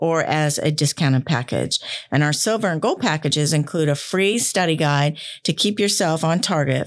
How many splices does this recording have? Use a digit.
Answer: 0